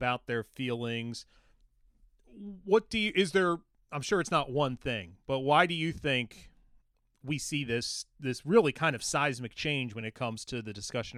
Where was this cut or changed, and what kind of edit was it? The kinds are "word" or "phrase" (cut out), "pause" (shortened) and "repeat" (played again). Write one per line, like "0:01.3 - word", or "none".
none